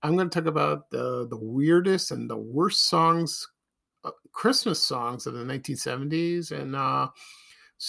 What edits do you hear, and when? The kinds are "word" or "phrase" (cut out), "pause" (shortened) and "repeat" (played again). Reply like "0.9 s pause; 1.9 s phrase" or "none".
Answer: none